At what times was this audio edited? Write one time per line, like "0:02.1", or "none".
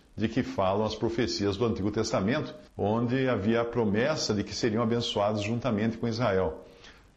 0:02.7